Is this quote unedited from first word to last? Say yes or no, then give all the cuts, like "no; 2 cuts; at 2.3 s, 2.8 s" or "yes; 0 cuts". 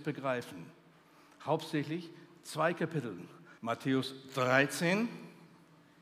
no; 1 cut; at 3.6 s